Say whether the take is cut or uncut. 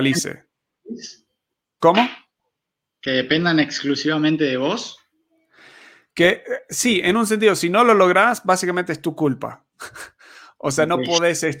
uncut